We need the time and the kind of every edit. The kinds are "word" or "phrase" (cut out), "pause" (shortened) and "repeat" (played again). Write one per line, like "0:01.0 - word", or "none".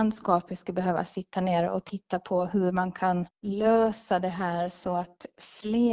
0:03.3 - pause